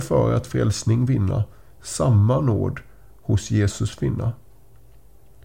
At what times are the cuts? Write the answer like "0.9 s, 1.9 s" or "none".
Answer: none

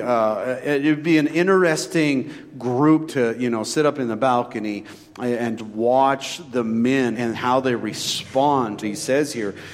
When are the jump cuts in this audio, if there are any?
3.1 s, 5.6 s, 7.1 s, 8.8 s

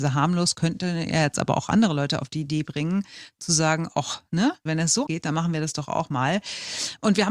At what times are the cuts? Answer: 4.7 s, 5.1 s

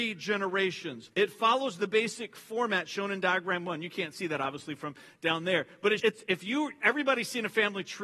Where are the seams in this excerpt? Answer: 1.1 s, 6.0 s

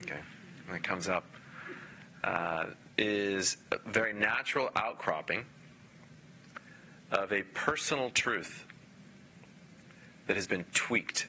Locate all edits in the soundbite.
3.0 s

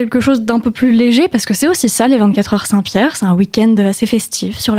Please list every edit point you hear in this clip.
none

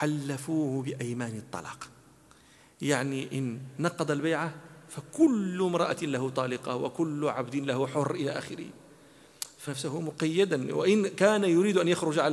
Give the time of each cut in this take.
9.7 s

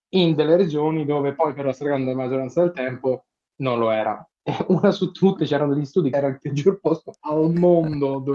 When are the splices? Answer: 6.1 s

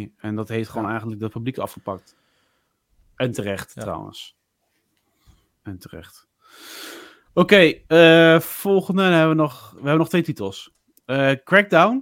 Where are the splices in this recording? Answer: none

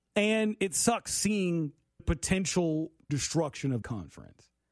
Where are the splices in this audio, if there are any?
2.0 s, 3.1 s, 3.8 s

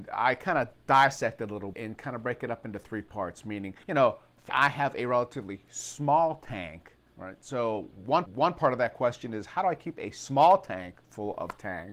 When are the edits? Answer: 1.7 s, 3.8 s, 4.5 s, 8.3 s, 11.0 s

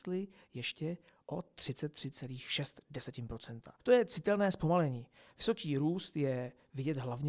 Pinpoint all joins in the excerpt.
none

